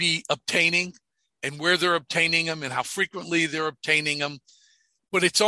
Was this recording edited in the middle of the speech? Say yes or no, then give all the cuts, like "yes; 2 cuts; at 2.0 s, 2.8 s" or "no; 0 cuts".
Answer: no; 0 cuts